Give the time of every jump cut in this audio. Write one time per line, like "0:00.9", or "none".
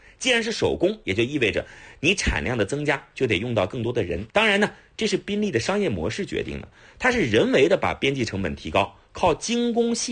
0:04.3